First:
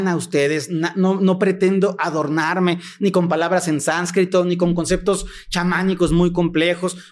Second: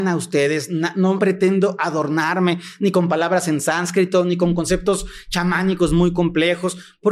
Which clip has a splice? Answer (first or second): second